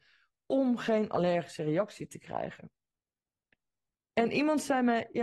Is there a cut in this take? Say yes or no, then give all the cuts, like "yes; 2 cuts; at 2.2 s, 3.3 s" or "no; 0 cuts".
no; 0 cuts